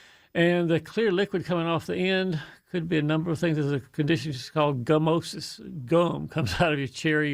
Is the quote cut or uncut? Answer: uncut